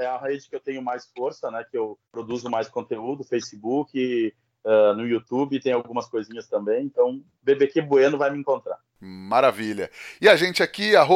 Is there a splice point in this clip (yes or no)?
yes